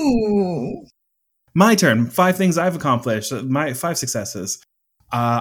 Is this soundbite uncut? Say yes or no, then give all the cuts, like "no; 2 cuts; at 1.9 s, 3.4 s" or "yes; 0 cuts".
yes; 0 cuts